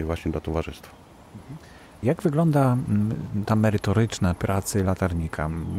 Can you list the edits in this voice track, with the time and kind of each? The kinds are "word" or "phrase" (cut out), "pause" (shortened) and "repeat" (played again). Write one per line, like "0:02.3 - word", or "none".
0:03.4 - word
0:04.4 - word